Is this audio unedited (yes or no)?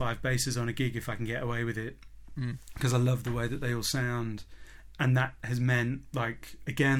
yes